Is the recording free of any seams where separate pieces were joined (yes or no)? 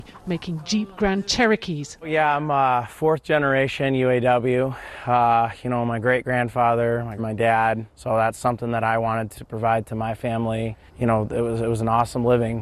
no